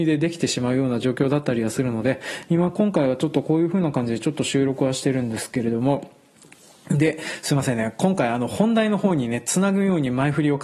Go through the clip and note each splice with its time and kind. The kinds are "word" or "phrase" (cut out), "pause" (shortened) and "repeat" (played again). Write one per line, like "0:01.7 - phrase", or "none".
none